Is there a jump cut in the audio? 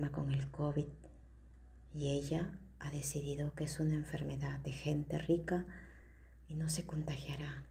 no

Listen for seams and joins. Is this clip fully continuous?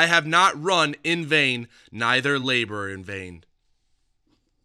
yes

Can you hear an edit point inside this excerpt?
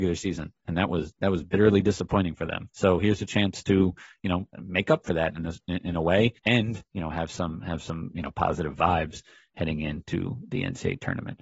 yes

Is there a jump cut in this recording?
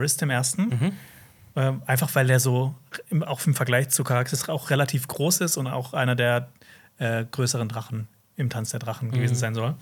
no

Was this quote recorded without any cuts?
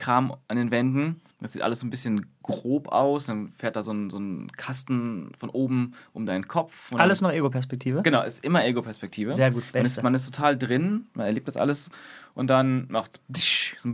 no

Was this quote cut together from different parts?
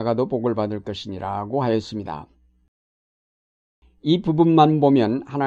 no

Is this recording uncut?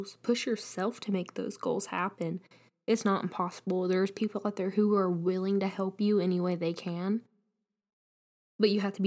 yes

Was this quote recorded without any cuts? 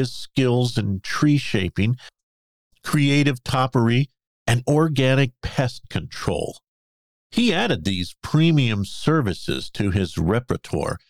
no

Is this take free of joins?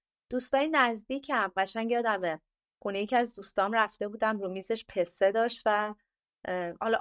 yes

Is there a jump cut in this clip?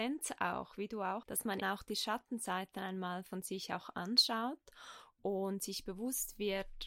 yes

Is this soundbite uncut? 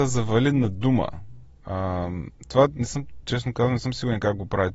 no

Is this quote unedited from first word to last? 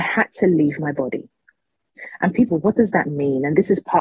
no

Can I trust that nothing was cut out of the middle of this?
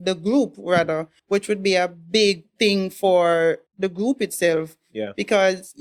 no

